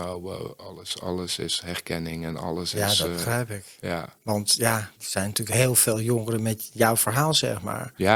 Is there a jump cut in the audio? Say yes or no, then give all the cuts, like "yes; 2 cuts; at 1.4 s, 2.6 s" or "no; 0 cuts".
yes; 1 cut; at 5.0 s